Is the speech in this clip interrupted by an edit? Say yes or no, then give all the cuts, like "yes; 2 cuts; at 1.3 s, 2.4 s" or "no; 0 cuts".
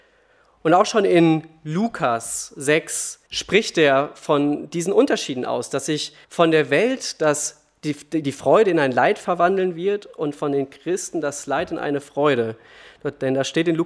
yes; 2 cuts; at 3.3 s, 6.2 s